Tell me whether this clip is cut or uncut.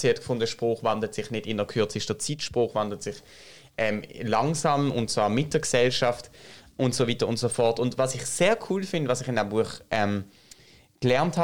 uncut